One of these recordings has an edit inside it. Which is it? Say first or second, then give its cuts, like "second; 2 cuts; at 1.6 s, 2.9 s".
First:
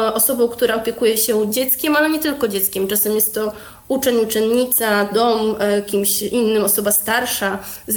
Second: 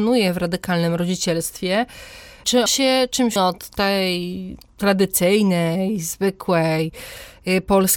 second; 2 cuts; at 2.7 s, 3.4 s